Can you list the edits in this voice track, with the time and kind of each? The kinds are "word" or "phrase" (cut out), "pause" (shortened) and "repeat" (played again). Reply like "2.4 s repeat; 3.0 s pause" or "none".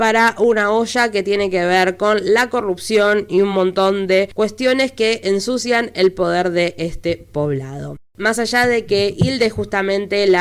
none